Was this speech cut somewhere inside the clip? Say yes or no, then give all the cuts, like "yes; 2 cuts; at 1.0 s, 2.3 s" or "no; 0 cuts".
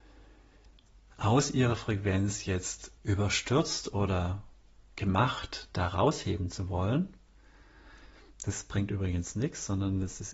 yes; 1 cut; at 3.0 s